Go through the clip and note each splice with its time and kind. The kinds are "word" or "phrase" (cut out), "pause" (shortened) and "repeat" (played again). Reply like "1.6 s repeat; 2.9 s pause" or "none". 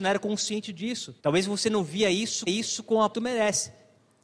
1.2 s pause; 2.5 s repeat; 3.1 s phrase